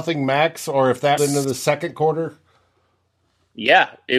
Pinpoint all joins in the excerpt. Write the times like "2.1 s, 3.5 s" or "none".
1.2 s